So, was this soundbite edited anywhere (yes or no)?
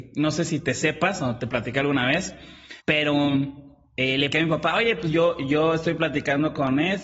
yes